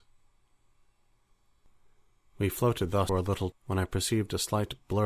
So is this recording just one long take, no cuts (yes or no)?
no